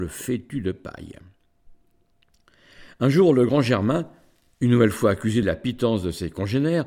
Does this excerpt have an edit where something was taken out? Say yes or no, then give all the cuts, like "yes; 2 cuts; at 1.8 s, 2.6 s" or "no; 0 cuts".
yes; 1 cut; at 5.4 s